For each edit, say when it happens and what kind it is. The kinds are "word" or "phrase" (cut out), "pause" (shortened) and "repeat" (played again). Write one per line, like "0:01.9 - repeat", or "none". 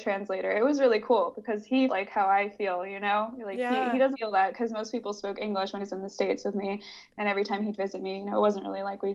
0:01.9 - word
0:04.1 - word
0:05.8 - word

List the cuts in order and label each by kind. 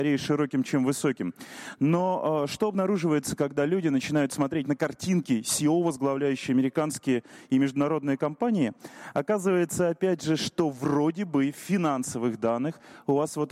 none

